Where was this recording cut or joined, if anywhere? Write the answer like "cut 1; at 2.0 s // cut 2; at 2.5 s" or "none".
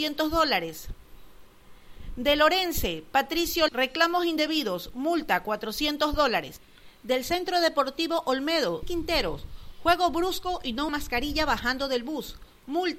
cut 1; at 3.7 s // cut 2; at 8.8 s // cut 3; at 10.9 s